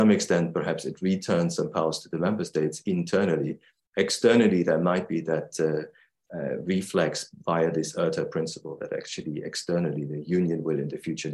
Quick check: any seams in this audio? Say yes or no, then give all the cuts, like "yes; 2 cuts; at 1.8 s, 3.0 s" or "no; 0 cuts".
no; 0 cuts